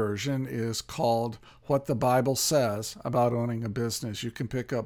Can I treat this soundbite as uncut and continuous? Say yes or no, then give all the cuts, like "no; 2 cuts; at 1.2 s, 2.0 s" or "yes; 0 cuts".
yes; 0 cuts